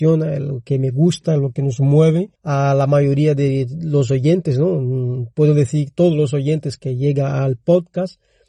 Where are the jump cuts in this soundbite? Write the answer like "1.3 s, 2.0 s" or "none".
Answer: 2.3 s, 6.8 s